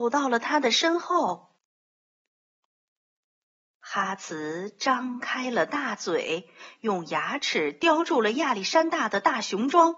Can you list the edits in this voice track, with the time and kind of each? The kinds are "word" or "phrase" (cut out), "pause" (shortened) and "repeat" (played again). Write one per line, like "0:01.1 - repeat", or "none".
none